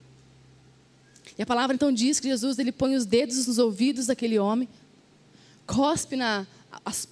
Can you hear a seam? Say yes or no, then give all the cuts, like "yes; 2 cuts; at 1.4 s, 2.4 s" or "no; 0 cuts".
no; 0 cuts